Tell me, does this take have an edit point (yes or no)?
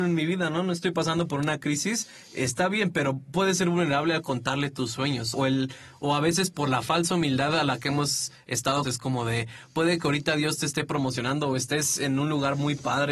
yes